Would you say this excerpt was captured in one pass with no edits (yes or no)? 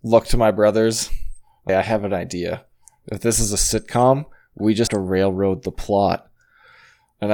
no